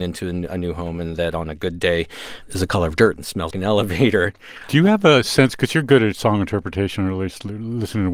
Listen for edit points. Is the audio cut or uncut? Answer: cut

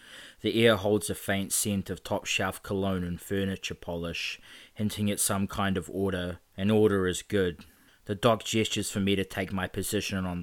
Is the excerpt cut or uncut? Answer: cut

